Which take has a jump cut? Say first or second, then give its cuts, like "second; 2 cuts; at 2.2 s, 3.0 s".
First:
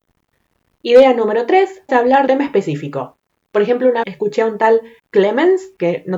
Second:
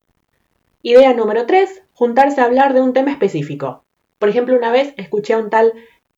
first; 4 cuts; at 1.9 s, 2.3 s, 4.0 s, 5.0 s